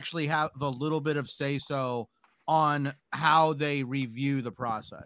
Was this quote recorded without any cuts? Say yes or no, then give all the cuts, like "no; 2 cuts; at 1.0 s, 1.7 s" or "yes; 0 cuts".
yes; 0 cuts